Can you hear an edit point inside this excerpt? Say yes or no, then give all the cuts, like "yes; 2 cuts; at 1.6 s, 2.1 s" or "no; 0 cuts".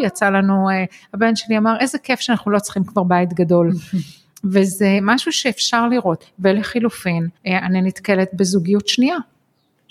yes; 1 cut; at 7.4 s